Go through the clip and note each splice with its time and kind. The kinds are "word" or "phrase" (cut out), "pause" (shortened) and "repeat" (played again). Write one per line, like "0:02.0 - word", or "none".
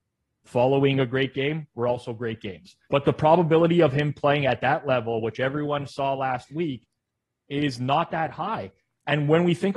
0:02.8 - pause